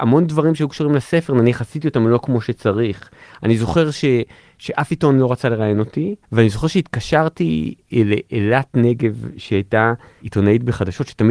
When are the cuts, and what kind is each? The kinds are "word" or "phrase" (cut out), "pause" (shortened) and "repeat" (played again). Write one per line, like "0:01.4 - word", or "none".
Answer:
0:06.2 - pause